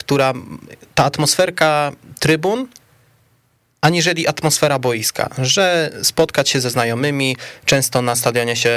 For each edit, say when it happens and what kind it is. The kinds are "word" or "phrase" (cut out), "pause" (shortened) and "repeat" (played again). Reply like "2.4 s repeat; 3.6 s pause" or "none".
none